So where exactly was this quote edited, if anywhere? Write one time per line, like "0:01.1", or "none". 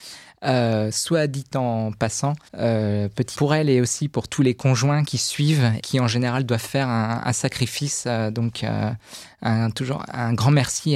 0:02.5
0:03.3
0:05.0
0:05.8